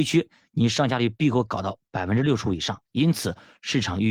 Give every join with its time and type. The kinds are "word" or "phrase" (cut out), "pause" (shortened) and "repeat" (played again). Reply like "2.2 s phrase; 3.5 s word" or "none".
2.9 s pause